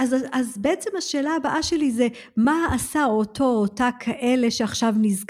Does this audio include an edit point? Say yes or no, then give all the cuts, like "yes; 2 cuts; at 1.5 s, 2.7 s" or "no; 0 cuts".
no; 0 cuts